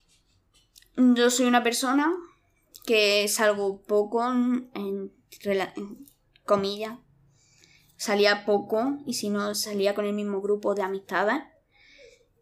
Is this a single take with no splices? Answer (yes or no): yes